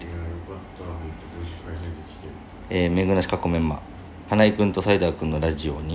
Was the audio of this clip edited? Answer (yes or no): no